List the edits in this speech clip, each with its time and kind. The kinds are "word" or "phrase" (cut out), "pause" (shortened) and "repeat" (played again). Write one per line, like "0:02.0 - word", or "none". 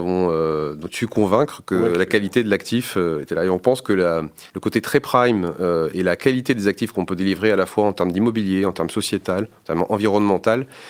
0:04.5 - pause